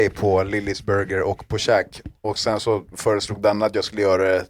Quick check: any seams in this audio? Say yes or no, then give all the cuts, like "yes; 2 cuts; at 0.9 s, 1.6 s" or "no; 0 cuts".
no; 0 cuts